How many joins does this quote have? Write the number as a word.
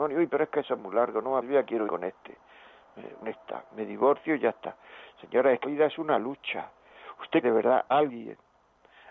six